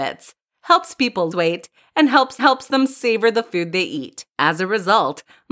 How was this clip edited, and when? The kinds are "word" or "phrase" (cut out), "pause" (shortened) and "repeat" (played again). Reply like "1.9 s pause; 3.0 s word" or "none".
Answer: 1.3 s word; 2.4 s repeat; 4.3 s pause